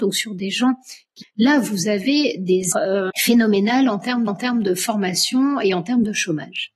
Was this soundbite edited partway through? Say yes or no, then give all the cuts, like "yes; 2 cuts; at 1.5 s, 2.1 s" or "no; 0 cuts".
yes; 4 cuts; at 1.2 s, 2.7 s, 3.1 s, 4.3 s